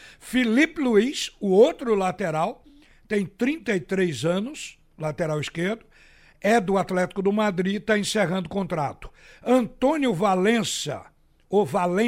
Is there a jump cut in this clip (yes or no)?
no